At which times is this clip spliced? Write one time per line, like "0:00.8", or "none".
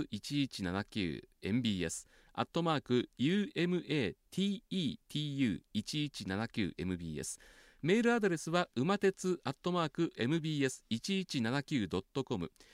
none